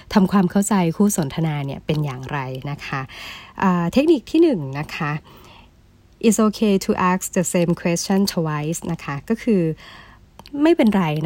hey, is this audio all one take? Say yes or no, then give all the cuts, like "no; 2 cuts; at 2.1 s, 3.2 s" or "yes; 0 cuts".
yes; 0 cuts